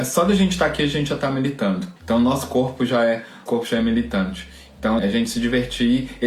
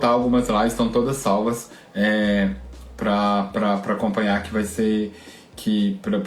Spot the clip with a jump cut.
first; 3 cuts; at 2.0 s, 3.5 s, 5.0 s

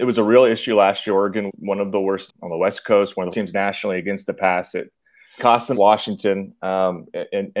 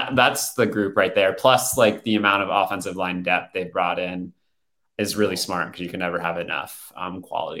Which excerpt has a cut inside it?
first; 5 cuts; at 1.5 s, 2.3 s, 3.3 s, 5.4 s, 5.7 s

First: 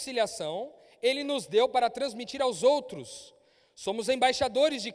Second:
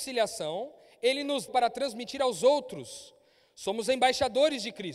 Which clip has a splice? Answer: second; 1 cut; at 1.5 s

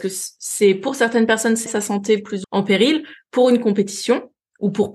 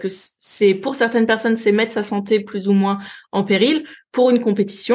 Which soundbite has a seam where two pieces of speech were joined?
first; 2 cuts; at 1.7 s, 2.4 s

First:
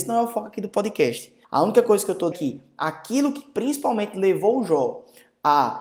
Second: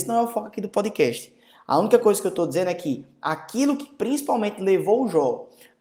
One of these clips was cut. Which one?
first; 2 cuts; at 1.4 s, 2.3 s

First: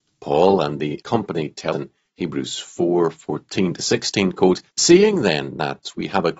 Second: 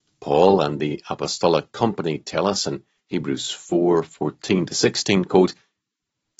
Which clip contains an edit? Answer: first; 3 cuts; at 1.0 s, 1.7 s, 4.7 s

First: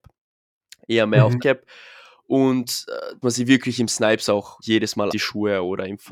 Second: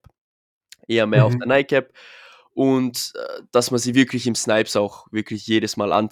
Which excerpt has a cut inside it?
first; 4 cuts; at 1.4 s, 3.2 s, 4.6 s, 5.1 s

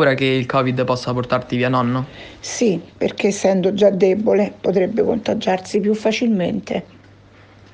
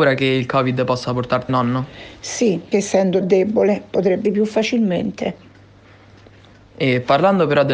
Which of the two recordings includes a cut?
second; 4 cuts; at 1.5 s, 2.7 s, 3.2 s, 4.2 s

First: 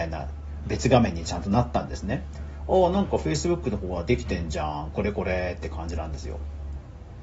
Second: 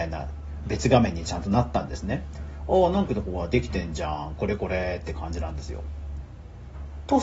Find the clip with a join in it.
second; 1 cut; at 3.1 s

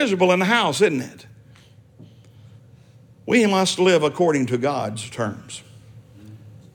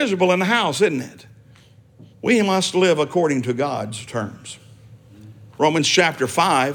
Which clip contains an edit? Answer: second; 2 cuts; at 2.1 s, 5.5 s

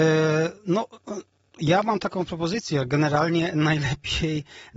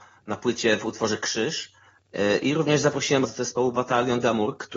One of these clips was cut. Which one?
second; 1 cut; at 3.2 s

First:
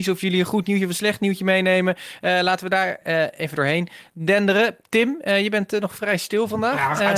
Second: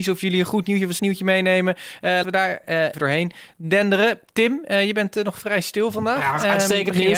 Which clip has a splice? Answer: second; 3 cuts; at 1.0 s, 2.2 s, 2.9 s

